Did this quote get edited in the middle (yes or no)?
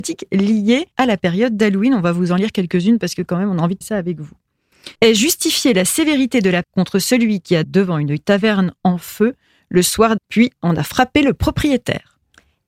yes